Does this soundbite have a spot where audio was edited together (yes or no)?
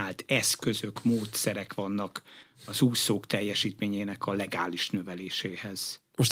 no